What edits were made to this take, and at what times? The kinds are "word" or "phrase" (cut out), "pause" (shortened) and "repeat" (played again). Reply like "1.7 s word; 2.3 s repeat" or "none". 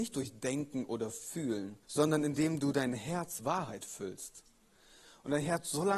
1.8 s pause; 3.4 s word